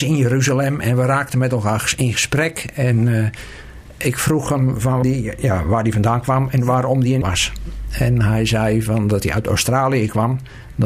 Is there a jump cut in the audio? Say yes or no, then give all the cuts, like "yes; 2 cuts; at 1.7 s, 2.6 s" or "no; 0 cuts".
yes; 2 cuts; at 5.0 s, 7.2 s